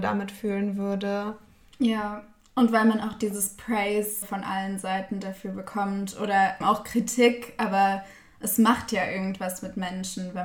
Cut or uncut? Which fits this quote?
cut